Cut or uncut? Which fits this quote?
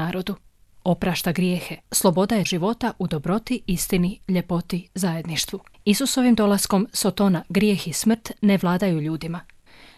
cut